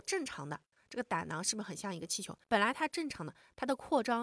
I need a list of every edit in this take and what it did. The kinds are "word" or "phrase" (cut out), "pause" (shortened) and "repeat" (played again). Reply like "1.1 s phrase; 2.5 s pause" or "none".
2.4 s pause